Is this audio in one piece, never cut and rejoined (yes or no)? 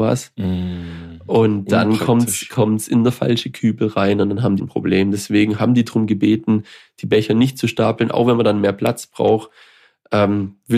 no